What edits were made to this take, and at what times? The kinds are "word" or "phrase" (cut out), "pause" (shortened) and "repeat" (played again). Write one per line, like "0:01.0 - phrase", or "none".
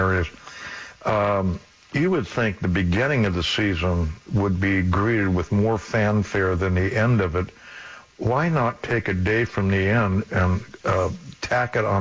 none